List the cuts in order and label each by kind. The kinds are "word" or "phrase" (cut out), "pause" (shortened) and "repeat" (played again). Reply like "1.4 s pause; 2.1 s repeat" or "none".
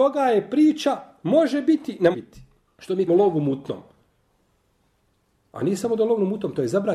2.1 s word; 3.1 s word